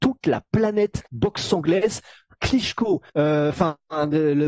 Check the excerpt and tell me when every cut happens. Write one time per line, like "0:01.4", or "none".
0:01.1
0:03.1